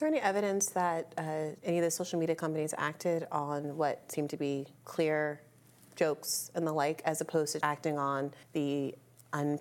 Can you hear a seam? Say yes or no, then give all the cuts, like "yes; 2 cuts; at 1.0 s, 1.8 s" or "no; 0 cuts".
yes; 4 cuts; at 1.6 s, 4.8 s, 7.6 s, 8.4 s